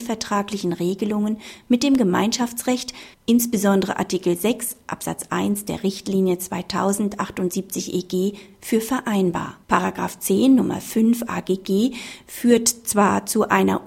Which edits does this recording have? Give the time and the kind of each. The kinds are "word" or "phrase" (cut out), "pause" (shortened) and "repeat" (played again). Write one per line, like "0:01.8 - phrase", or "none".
0:03.1 - pause
0:09.6 - pause